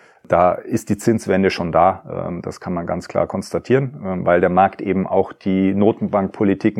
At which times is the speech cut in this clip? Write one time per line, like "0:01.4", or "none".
none

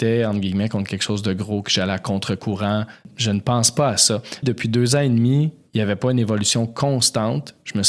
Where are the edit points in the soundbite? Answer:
0:04.4

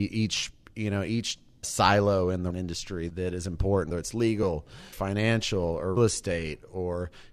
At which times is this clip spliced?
0:01.6
0:02.5
0:03.1
0:03.9
0:04.9
0:06.0

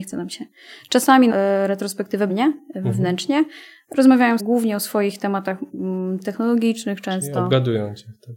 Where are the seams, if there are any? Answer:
0:01.3
0:02.3
0:04.4
0:05.2

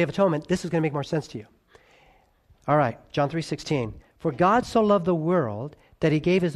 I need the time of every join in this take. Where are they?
none

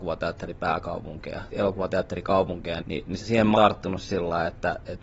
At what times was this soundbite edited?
0:01.5
0:02.8
0:03.2
0:03.5

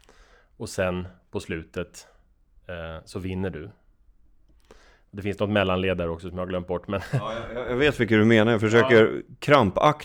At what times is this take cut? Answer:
none

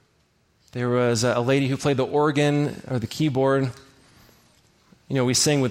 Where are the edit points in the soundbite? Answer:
none

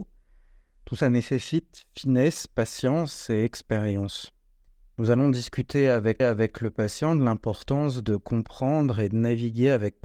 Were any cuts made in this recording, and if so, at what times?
0:01.0
0:04.7
0:06.2

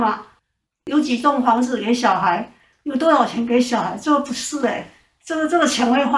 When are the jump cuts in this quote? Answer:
none

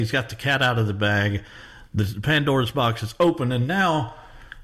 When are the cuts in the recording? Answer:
none

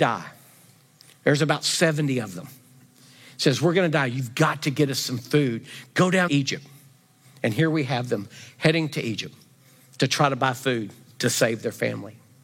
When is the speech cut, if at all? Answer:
0:06.3

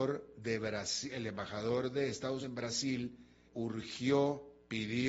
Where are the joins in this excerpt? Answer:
0:02.4
0:03.5

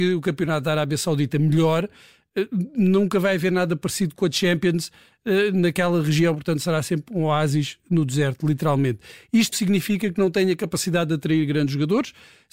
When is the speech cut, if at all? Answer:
0:09.5

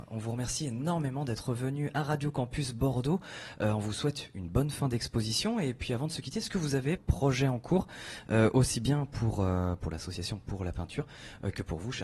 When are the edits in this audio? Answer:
0:07.0

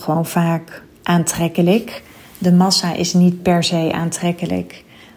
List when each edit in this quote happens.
none

